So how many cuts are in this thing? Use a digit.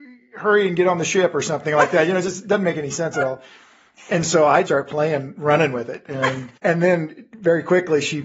2